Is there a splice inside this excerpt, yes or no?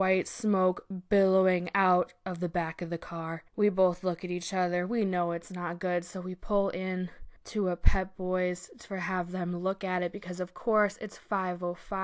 yes